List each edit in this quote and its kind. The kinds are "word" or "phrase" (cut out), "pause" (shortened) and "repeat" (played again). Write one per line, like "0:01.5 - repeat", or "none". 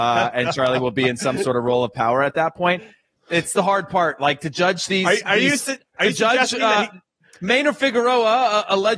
none